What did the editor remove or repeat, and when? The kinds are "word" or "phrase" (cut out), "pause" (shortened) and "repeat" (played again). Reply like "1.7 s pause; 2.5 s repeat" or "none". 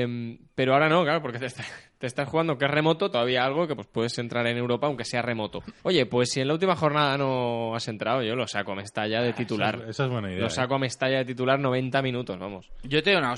3.1 s phrase; 3.8 s word; 5.8 s pause